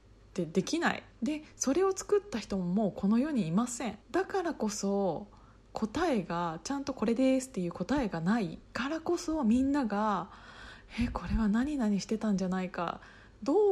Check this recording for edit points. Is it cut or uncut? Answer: cut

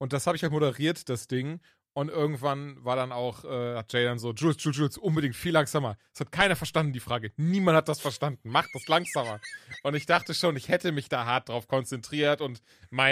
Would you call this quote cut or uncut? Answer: uncut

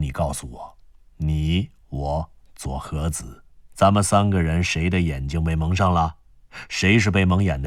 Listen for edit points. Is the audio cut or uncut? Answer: uncut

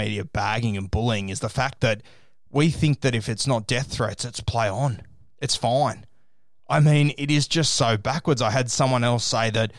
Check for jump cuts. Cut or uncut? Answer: uncut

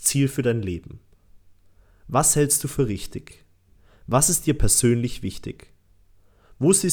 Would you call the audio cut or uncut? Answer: uncut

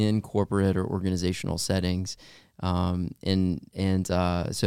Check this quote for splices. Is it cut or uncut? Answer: uncut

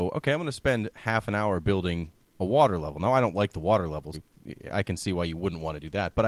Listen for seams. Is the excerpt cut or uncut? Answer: cut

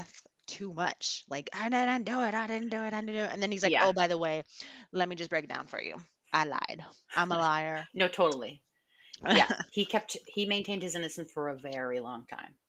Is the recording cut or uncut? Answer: uncut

